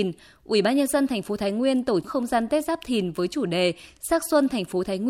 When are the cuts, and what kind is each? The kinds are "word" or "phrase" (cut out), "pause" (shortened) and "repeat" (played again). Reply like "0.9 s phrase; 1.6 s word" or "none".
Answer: 2.0 s word